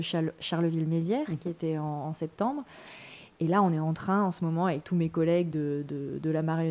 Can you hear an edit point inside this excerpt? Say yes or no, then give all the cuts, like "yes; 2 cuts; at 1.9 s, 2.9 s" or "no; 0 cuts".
no; 0 cuts